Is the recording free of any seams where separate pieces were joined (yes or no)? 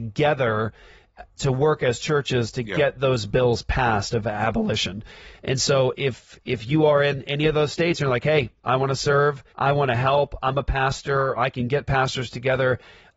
no